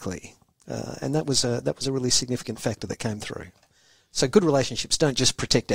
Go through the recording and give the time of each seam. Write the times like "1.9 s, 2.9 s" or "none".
none